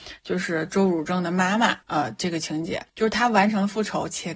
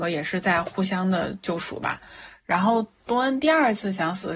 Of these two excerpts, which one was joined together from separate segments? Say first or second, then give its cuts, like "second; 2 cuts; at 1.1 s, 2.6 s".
first; 2 cuts; at 1.8 s, 2.9 s